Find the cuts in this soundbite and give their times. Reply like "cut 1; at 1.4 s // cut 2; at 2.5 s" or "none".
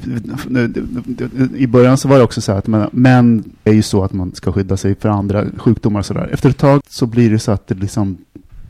cut 1; at 3.7 s // cut 2; at 6.8 s